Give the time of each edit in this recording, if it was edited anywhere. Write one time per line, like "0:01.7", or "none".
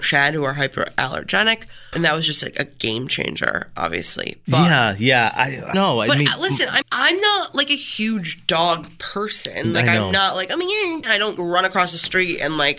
0:01.9
0:05.7
0:06.8
0:11.0
0:11.4